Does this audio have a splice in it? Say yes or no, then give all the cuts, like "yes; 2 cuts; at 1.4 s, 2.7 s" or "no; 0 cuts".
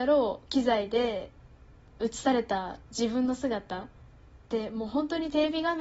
no; 0 cuts